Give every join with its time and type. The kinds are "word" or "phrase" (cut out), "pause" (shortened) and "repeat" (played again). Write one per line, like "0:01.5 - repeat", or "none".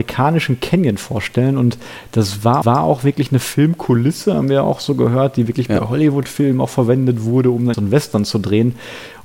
0:02.6 - repeat
0:07.7 - word